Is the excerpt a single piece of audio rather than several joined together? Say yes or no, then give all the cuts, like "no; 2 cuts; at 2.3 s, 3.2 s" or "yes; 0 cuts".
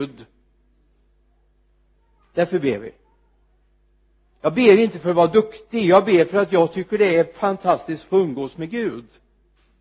yes; 0 cuts